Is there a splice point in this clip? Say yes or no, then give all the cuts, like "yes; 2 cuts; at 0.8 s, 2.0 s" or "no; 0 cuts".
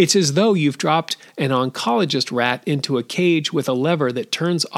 no; 0 cuts